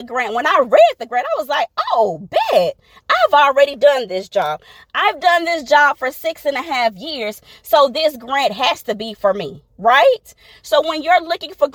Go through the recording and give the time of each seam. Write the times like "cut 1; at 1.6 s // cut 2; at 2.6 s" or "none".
none